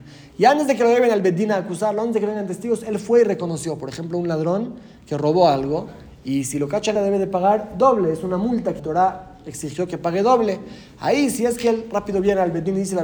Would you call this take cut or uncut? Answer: cut